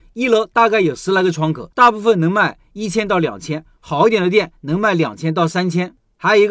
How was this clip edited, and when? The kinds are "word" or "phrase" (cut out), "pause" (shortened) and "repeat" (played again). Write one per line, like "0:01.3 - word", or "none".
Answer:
0:01.7 - pause